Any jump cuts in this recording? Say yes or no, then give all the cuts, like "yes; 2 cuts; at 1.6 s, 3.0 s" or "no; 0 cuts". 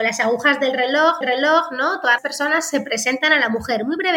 yes; 2 cuts; at 1.2 s, 2.2 s